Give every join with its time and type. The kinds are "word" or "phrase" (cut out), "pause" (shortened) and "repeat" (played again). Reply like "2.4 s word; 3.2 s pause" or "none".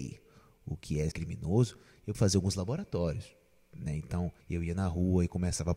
1.1 s phrase; 2.1 s word; 4.4 s pause